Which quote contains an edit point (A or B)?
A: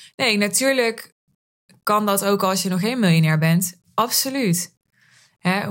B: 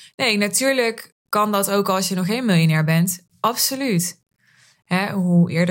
B